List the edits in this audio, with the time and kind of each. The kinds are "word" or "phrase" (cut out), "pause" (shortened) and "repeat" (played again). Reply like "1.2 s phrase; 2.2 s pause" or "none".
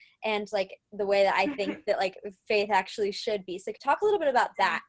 3.8 s word